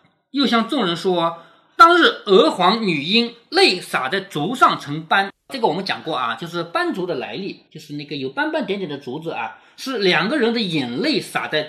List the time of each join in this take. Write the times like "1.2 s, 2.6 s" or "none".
7.7 s